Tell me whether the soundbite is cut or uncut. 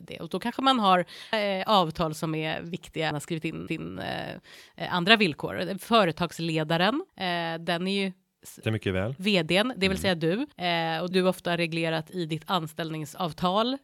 cut